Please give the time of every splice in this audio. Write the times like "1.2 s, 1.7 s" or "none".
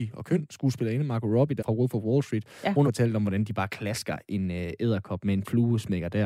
1.6 s, 2.8 s